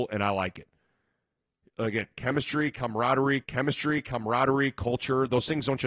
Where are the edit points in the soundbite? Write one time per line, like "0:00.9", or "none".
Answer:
0:03.4

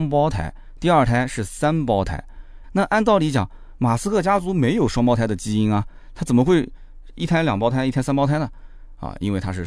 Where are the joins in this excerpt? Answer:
0:02.6

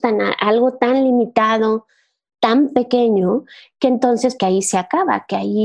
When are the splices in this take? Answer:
0:04.4

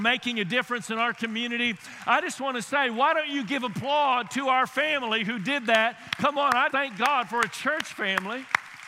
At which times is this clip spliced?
0:06.7

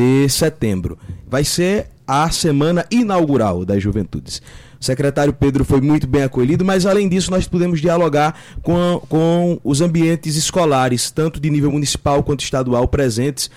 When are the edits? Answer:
0:02.0

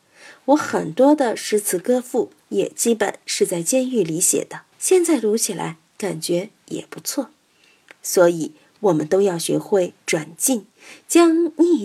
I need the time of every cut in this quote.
0:04.7

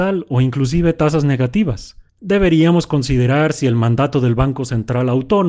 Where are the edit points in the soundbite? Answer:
0:02.1

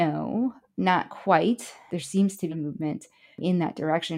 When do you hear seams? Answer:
0:02.5

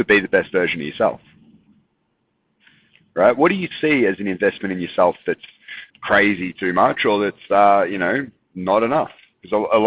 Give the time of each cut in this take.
0:05.9

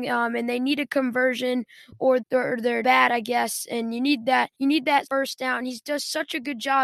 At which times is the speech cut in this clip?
0:02.2
0:02.8
0:04.5
0:05.0

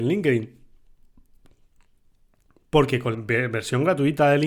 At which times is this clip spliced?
0:03.1

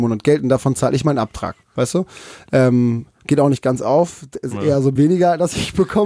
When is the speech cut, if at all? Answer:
0:01.6
0:05.0

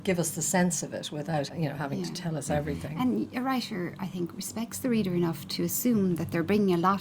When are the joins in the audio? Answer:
0:01.5

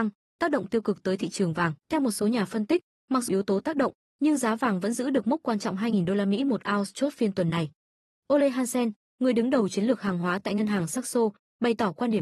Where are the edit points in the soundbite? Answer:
0:01.8
0:03.3

